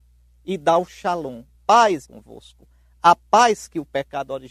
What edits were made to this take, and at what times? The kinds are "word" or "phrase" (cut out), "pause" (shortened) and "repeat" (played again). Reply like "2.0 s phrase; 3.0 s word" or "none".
1.5 s word; 2.0 s word